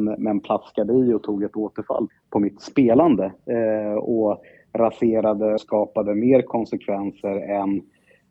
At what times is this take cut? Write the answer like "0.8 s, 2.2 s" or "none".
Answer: 2.1 s, 5.6 s